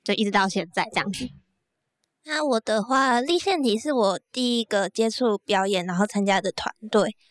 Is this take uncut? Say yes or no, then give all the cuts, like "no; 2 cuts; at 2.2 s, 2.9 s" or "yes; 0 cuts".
yes; 0 cuts